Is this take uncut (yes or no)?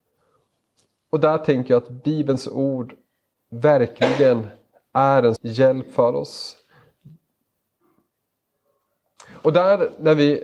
no